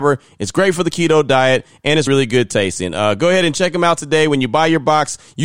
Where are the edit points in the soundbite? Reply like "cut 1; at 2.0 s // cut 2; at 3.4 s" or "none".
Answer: cut 1; at 2.1 s